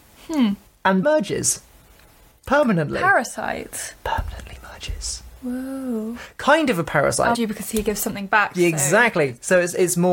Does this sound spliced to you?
yes; 2 cuts; at 1.0 s, 7.3 s

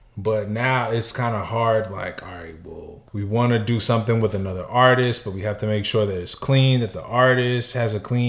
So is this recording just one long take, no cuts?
no; 1 cut; at 3.1 s

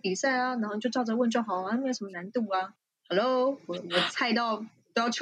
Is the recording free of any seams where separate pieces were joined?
yes; 0 cuts

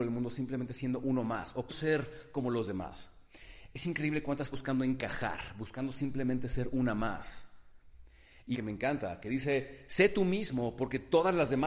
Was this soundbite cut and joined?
yes; 3 cuts; at 1.7 s, 4.5 s, 8.5 s

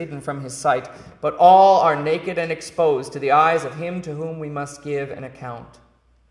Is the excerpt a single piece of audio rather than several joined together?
yes; 0 cuts

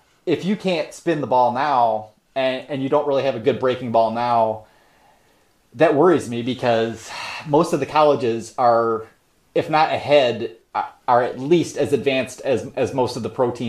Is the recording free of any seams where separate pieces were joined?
no; 1 cut; at 9.3 s

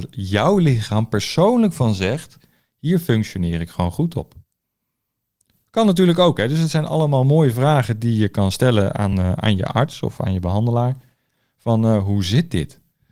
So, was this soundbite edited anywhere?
no; 0 cuts

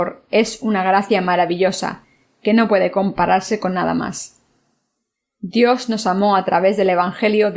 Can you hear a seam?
no; 0 cuts

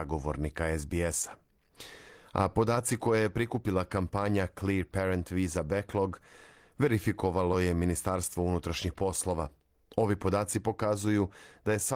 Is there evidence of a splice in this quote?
no; 0 cuts

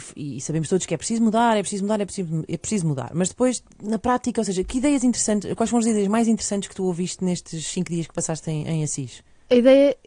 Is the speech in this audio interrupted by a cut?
no; 0 cuts

